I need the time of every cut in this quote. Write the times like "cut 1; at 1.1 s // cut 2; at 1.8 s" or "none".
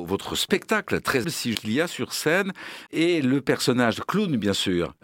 cut 1; at 1.2 s // cut 2; at 1.5 s // cut 3; at 2.9 s